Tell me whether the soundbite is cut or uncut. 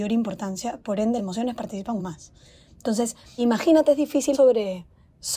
cut